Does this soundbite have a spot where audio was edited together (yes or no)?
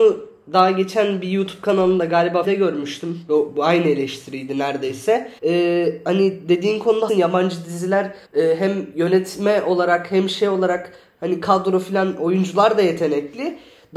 yes